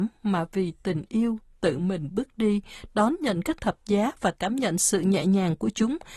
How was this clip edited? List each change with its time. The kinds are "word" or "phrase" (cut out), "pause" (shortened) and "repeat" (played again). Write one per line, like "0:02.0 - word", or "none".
none